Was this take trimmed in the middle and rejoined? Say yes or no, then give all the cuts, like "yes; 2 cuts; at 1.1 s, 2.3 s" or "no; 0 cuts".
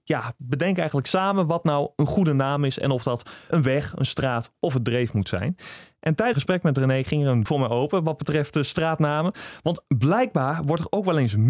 yes; 3 cuts; at 3.5 s, 6.3 s, 7.5 s